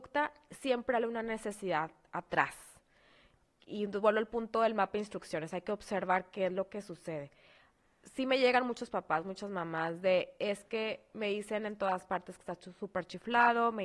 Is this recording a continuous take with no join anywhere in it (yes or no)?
yes